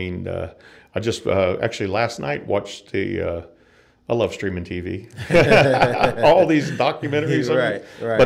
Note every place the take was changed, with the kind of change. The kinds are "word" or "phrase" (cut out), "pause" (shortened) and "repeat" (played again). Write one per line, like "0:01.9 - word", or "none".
none